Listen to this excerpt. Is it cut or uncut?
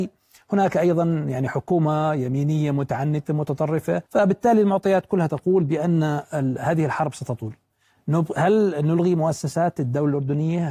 cut